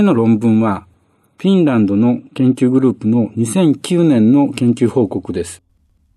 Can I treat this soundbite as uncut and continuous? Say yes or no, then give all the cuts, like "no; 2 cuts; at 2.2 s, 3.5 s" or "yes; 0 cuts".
yes; 0 cuts